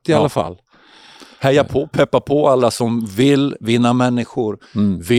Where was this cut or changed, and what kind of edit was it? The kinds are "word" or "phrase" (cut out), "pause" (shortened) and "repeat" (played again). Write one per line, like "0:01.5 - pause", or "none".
none